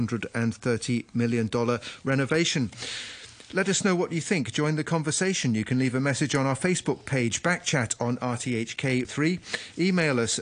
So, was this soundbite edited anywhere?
yes; 1 cut; at 9.0 s

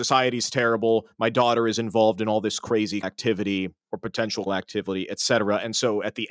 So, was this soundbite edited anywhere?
yes; 3 cuts; at 3.0 s, 3.8 s, 4.5 s

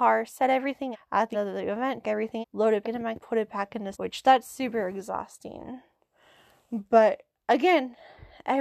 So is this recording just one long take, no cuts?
no; 7 cuts; at 0.9 s, 1.3 s, 2.0 s, 2.4 s, 2.8 s, 3.2 s, 3.9 s

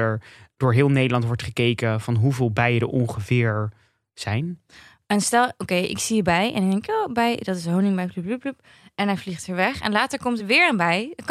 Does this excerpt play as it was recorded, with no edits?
yes; 0 cuts

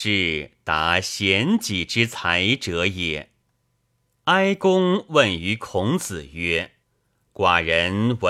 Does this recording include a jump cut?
yes; 1 cut; at 6.8 s

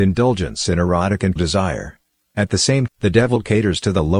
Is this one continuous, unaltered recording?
no; 2 cuts; at 1.4 s, 2.9 s

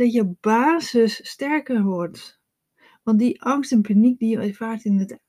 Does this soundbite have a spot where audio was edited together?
no; 0 cuts

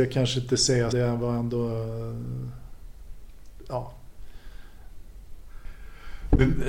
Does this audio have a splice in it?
yes; 1 cut; at 0.9 s

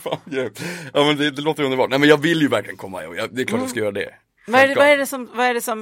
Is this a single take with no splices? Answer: yes; 0 cuts

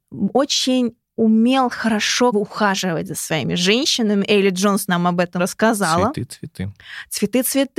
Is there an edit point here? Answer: yes; 2 cuts; at 2.3 s, 5.4 s

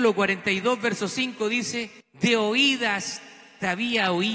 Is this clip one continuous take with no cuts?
no; 1 cut; at 2.0 s

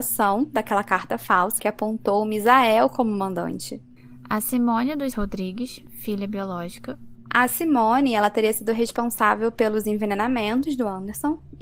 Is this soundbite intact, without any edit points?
no; 2 cuts; at 1.6 s, 5.1 s

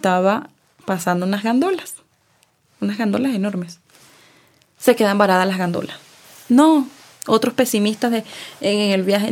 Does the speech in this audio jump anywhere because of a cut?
no; 0 cuts

